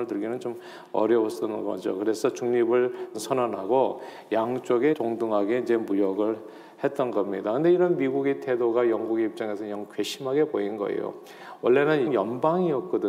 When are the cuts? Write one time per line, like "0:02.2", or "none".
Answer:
0:03.1
0:04.9
0:12.1